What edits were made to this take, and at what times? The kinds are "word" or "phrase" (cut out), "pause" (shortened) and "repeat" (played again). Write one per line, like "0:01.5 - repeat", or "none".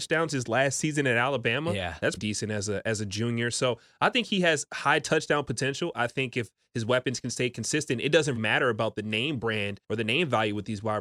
0:02.2 - word
0:08.4 - word
0:09.8 - pause